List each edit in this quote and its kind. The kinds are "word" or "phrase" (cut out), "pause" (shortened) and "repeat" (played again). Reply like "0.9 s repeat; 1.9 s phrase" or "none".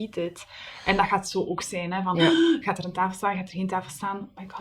none